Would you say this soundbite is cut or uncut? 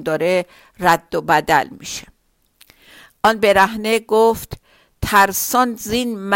uncut